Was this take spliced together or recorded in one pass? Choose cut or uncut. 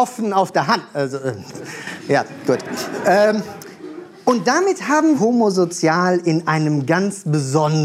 cut